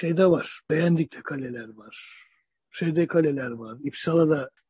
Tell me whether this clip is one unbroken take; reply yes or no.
yes